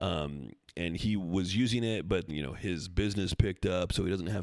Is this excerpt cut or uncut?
cut